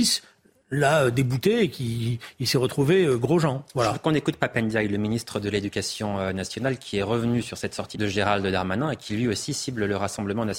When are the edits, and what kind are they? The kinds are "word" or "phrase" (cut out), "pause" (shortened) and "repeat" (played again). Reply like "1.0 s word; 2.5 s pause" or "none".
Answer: 7.9 s word